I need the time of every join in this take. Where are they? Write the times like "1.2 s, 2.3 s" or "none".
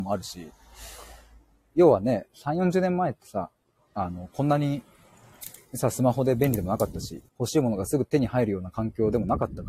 7.3 s